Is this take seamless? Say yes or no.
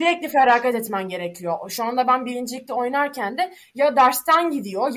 yes